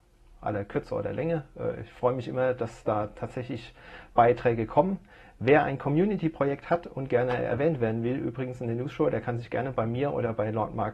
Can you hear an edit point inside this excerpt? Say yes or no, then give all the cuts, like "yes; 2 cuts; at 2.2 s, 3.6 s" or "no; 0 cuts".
no; 0 cuts